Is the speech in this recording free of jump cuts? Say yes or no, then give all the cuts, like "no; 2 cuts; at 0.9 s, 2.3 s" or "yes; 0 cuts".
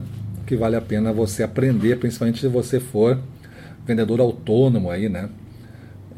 yes; 0 cuts